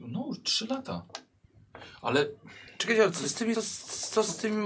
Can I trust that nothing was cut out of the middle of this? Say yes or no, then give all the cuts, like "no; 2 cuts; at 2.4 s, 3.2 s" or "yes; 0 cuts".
no; 1 cut; at 3.5 s